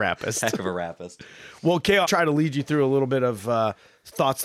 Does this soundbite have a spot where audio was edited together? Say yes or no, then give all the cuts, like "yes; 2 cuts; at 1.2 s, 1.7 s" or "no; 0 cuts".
yes; 1 cut; at 2.0 s